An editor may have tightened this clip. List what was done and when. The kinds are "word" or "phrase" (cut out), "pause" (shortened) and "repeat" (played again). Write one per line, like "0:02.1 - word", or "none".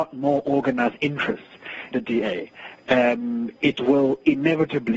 0:01.9 - word